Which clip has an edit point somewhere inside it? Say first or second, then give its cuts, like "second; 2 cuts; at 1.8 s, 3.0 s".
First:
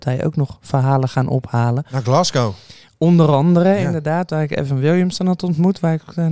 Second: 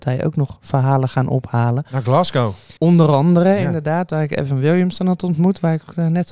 second; 1 cut; at 2.8 s